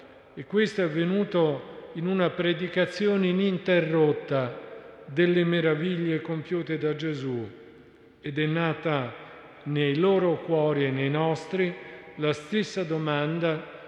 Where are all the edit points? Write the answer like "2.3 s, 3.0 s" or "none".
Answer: none